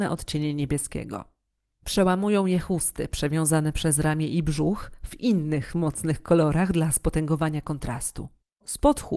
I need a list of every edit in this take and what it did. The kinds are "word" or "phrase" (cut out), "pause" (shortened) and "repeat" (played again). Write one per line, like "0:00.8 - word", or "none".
none